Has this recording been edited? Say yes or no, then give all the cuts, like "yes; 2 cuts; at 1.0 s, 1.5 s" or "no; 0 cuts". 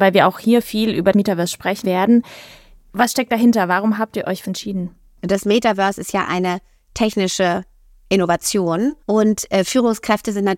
yes; 4 cuts; at 1.1 s, 1.8 s, 4.4 s, 9.0 s